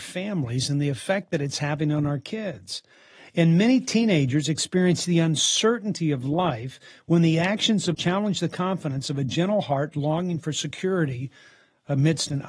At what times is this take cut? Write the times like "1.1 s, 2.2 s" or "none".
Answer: 7.9 s